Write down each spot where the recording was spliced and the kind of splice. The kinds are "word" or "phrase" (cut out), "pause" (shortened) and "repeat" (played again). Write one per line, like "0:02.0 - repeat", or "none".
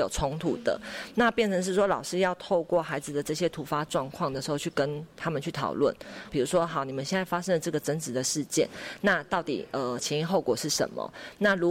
0:06.3 - phrase